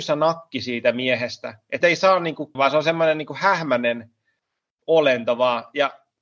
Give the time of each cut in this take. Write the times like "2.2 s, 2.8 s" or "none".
1.8 s, 2.5 s